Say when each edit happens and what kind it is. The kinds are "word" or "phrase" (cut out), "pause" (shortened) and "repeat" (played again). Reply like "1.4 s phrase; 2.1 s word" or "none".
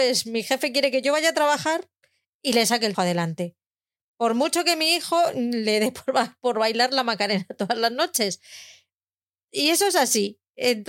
2.9 s word